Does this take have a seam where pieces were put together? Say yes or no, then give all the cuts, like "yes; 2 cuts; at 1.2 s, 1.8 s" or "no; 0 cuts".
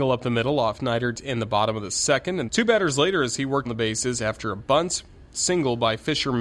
yes; 2 cuts; at 2.5 s, 3.7 s